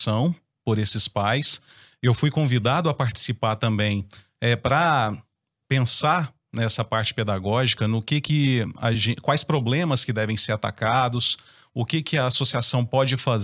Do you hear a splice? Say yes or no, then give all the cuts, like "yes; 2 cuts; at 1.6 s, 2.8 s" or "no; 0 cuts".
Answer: no; 0 cuts